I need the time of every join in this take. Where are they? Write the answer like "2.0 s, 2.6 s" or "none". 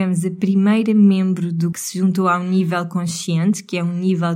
1.7 s